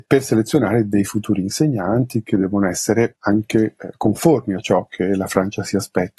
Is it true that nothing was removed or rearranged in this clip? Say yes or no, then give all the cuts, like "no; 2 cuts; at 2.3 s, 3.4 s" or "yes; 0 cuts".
yes; 0 cuts